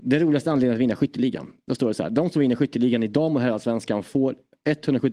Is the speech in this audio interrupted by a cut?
no; 0 cuts

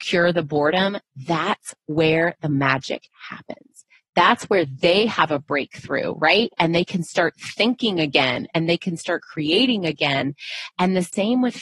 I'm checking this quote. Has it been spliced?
no; 0 cuts

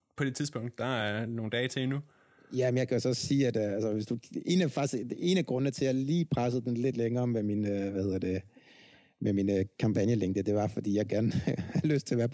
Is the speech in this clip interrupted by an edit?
no; 0 cuts

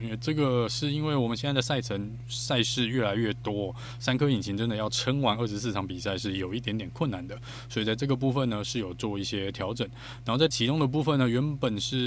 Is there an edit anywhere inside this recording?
yes; 1 cut; at 10.5 s

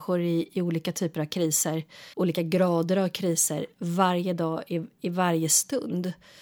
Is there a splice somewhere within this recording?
yes; 1 cut; at 2.1 s

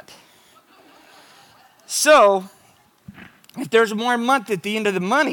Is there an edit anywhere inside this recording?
no; 0 cuts

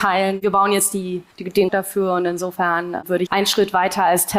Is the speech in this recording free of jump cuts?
no; 3 cuts; at 1.3 s, 1.7 s, 3.3 s

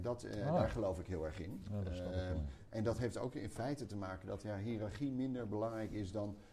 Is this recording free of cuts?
yes; 0 cuts

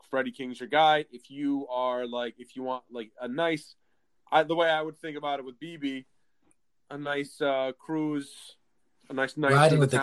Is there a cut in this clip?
no; 0 cuts

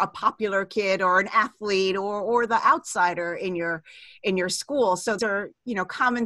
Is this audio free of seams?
no; 1 cut; at 5.2 s

